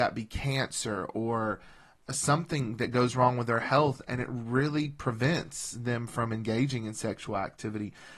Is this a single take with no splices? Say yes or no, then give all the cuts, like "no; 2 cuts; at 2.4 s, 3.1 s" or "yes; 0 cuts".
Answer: yes; 0 cuts